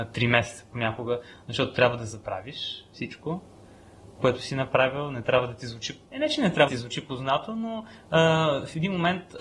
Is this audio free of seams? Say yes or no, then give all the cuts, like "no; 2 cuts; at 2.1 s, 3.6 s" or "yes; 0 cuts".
no; 2 cuts; at 6.1 s, 6.7 s